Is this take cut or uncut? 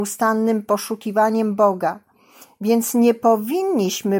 uncut